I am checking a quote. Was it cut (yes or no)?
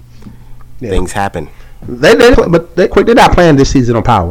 yes